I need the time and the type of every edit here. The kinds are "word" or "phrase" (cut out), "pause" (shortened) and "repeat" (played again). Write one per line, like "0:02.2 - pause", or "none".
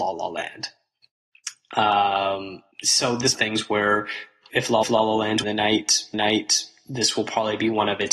0:02.7 - pause
0:03.3 - phrase
0:04.5 - word
0:04.8 - repeat
0:05.4 - phrase
0:06.1 - repeat

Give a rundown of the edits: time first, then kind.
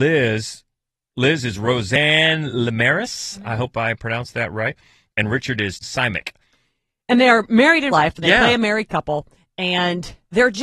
0:05.8 - word
0:07.9 - word

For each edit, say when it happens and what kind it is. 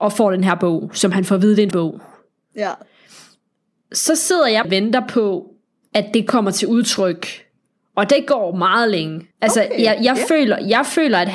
0:01.7 - word
0:04.6 - word
0:09.3 - pause

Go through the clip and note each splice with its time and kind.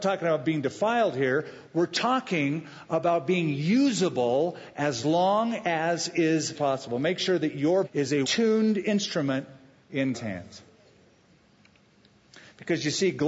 0:06.5 - word
0:07.8 - word
0:08.2 - word
0:10.1 - word

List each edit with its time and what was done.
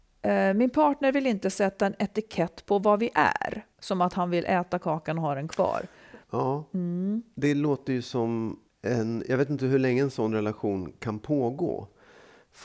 0:03.7 - pause
0:08.7 - pause

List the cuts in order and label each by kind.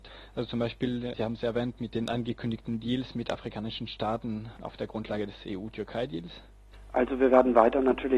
0:01.1 - word

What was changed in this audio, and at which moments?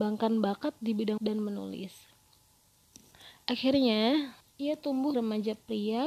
0:01.2 - word
0:04.4 - pause
0:05.1 - word

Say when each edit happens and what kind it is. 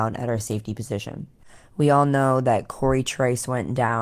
none

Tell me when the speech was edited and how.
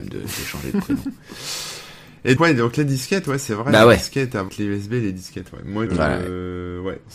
0:02.4 - word
0:04.5 - word
0:05.9 - word

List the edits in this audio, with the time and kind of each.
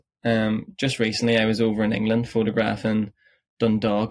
none

